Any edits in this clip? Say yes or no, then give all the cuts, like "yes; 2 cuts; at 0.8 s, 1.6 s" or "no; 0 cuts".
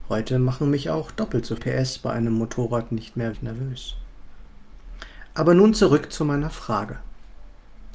yes; 2 cuts; at 1.6 s, 3.3 s